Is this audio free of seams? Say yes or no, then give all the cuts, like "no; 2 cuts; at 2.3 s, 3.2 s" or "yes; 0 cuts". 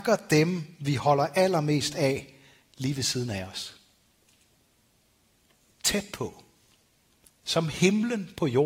yes; 0 cuts